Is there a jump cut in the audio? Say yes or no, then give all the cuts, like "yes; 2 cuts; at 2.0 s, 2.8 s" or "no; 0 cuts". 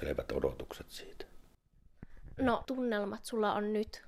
yes; 1 cut; at 2.6 s